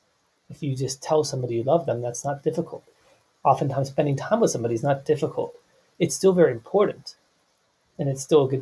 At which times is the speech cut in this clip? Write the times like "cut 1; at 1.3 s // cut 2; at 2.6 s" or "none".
none